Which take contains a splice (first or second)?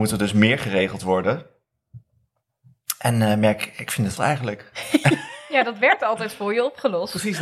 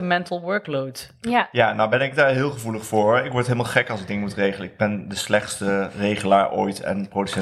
first